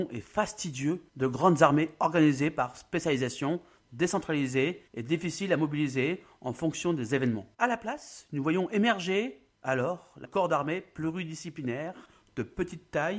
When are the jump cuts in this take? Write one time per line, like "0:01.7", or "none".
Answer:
0:01.1
0:04.9
0:07.5
0:09.5
0:10.2